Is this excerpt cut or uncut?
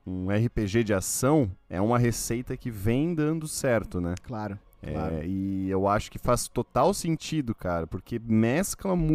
uncut